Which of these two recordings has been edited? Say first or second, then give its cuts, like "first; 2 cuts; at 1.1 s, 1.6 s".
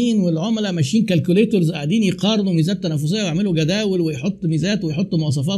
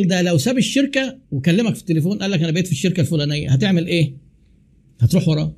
second; 1 cut; at 1.2 s